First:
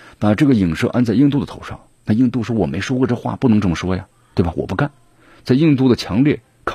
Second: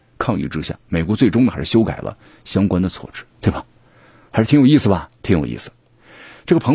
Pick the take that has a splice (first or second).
second